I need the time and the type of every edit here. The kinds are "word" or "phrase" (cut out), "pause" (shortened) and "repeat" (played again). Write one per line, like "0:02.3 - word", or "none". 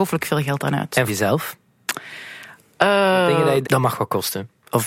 0:01.1 - word
0:03.6 - word